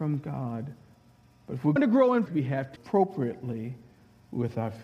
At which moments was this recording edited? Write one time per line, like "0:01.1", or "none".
0:01.8
0:02.3
0:02.8